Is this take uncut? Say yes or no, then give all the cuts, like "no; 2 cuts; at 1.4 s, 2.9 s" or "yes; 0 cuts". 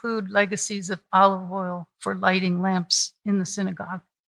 yes; 0 cuts